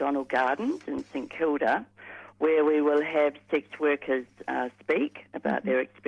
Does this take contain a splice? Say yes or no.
no